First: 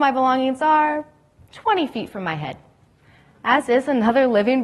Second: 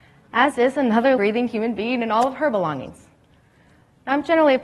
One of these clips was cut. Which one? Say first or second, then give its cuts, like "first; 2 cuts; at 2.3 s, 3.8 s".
second; 1 cut; at 1.2 s